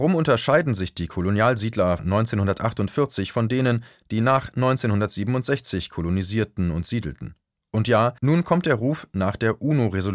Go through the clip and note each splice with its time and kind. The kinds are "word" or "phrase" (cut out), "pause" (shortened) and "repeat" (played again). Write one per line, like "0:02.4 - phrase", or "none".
0:02.0 - word
0:08.2 - pause